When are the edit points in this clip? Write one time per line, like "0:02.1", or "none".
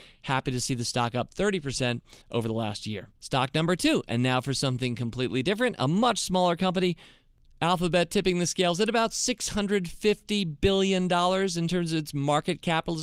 0:02.2
0:03.2